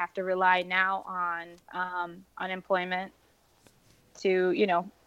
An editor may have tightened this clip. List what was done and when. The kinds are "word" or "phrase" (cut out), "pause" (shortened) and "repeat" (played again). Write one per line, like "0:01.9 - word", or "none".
0:01.6 - pause